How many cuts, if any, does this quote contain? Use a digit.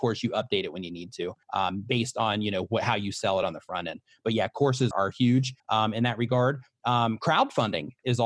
3